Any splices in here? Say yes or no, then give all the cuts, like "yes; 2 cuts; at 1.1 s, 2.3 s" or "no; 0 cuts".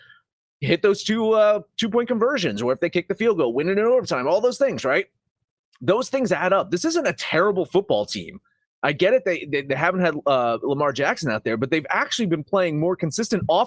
no; 0 cuts